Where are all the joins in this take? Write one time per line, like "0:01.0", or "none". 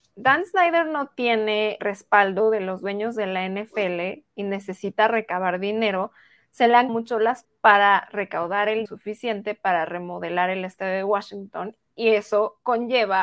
0:01.8
0:06.9
0:07.4
0:08.9